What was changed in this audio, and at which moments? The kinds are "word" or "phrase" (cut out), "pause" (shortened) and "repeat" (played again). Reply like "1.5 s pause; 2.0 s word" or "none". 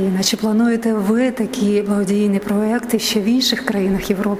none